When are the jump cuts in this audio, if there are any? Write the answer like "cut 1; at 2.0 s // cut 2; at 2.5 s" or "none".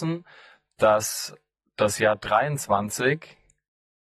none